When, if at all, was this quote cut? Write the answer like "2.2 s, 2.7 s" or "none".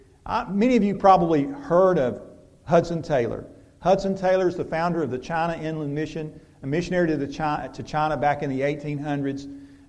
none